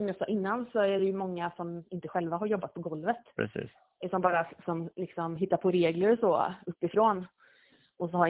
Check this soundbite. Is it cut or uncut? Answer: uncut